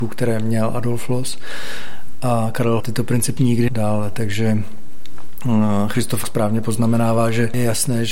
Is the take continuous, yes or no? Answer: no